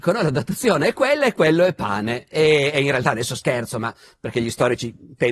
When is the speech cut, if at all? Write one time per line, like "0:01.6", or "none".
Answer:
none